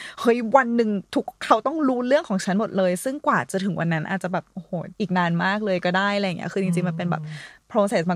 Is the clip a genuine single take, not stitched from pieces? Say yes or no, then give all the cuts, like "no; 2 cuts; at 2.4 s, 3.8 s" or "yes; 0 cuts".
no; 1 cut; at 4.9 s